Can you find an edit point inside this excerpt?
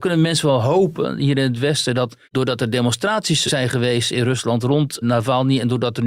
yes; 3 cuts; at 2.2 s, 3.5 s, 5.0 s

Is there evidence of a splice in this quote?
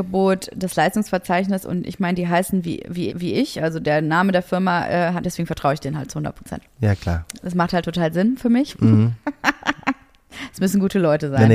yes; 2 cuts; at 3.1 s, 5.2 s

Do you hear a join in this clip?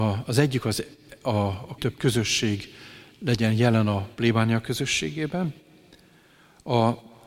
yes; 1 cut; at 1.8 s

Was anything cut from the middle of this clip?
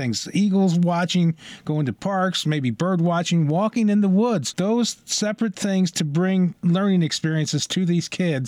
no; 0 cuts

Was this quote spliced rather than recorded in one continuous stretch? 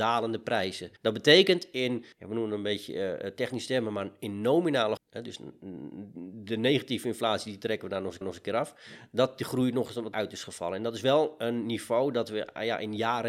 yes; 5 cuts; at 1.0 s, 2.1 s, 5.0 s, 8.2 s, 10.1 s

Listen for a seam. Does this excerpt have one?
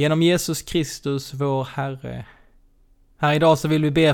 no; 0 cuts

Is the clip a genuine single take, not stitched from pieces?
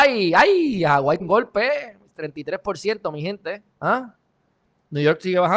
no; 2 cuts; at 1.2 s, 3.7 s

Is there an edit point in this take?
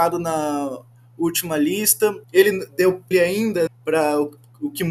yes; 3 cuts; at 2.2 s, 3.1 s, 3.7 s

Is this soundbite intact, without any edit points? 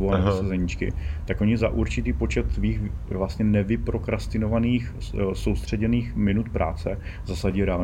yes; 0 cuts

